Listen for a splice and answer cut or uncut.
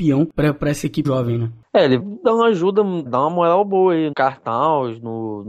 cut